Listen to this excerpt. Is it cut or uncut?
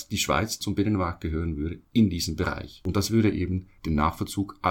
uncut